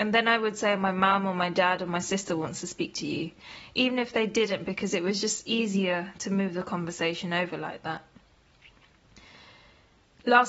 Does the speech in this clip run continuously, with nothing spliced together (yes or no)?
yes